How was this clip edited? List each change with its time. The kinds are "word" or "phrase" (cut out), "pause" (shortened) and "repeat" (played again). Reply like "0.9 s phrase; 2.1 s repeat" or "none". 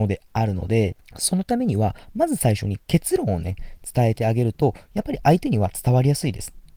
1.1 s pause